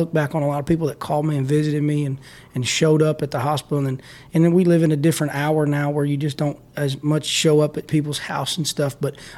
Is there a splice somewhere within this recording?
no; 0 cuts

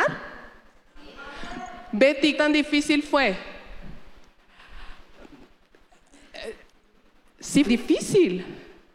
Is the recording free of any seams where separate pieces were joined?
no; 2 cuts; at 2.3 s, 7.6 s

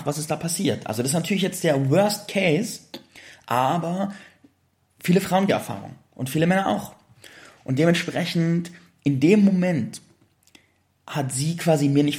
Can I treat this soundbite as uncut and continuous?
no; 1 cut; at 5.5 s

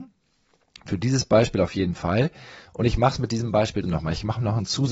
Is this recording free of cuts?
no; 1 cut; at 3.8 s

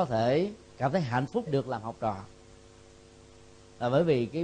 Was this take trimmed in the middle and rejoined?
yes; 1 cut; at 1.5 s

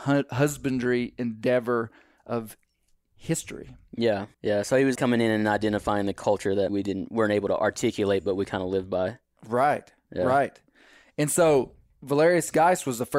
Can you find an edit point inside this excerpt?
yes; 3 cuts; at 4.3 s, 4.9 s, 6.7 s

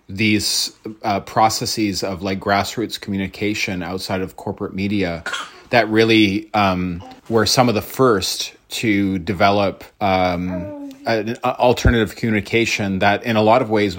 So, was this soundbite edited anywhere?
yes; 2 cuts; at 7.2 s, 9.9 s

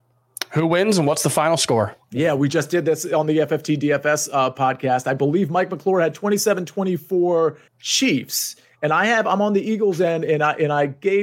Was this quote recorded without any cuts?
no; 2 cuts; at 2.0 s, 7.7 s

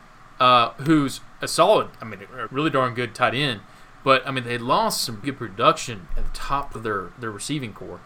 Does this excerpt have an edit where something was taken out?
yes; 3 cuts; at 2.5 s, 5.2 s, 6.8 s

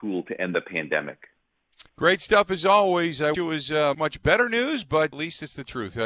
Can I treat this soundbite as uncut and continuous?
no; 4 cuts; at 1.9 s, 3.3 s, 3.9 s, 5.1 s

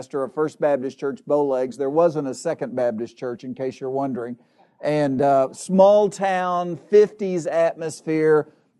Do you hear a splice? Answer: no; 0 cuts

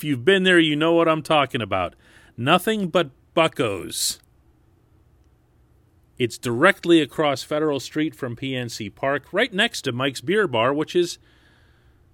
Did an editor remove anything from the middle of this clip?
no; 0 cuts

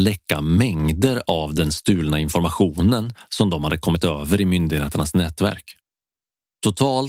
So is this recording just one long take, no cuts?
yes; 0 cuts

